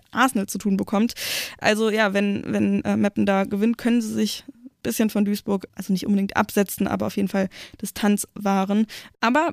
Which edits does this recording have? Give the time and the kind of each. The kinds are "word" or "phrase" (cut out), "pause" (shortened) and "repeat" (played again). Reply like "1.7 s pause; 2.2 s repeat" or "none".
none